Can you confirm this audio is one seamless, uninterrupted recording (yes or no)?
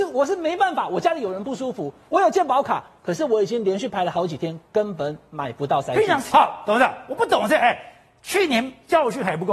yes